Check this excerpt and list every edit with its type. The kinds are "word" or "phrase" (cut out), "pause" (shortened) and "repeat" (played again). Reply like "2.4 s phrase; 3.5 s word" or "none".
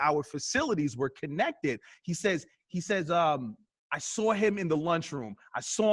none